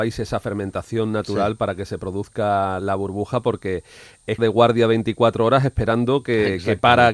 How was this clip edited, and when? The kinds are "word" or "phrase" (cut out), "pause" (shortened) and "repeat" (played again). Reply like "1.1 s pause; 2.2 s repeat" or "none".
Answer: 2.8 s word; 4.4 s phrase